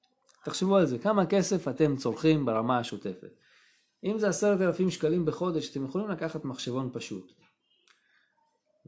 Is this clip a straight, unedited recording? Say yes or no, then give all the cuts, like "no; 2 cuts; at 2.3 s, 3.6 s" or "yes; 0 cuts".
yes; 0 cuts